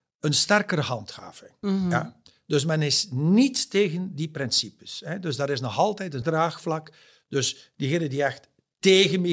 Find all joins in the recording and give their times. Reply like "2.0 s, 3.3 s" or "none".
6.2 s